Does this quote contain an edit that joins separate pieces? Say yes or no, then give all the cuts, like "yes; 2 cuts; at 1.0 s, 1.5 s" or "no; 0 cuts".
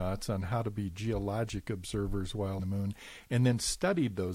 yes; 1 cut; at 2.6 s